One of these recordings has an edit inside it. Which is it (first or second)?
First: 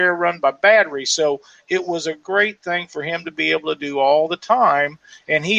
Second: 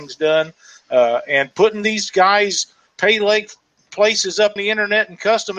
second